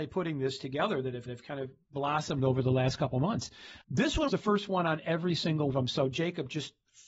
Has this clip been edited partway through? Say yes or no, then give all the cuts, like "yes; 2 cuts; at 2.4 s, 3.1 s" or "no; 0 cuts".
yes; 4 cuts; at 1.3 s, 3.8 s, 4.3 s, 5.7 s